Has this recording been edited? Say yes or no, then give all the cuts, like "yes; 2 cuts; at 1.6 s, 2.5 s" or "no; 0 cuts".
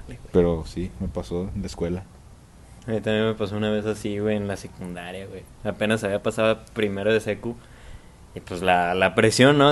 no; 0 cuts